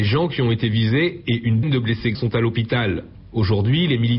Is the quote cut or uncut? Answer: cut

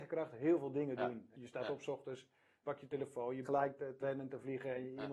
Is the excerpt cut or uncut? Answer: cut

